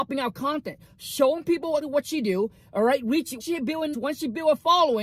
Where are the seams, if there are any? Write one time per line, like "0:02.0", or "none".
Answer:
0:01.8
0:03.4
0:03.9